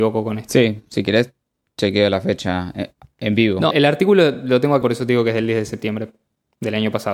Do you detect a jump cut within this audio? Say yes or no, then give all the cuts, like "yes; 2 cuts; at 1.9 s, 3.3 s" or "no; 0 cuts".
yes; 2 cuts; at 3.7 s, 4.8 s